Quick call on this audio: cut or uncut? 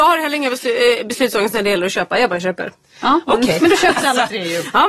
cut